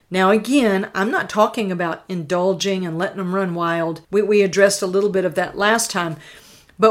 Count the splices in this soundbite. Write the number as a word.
one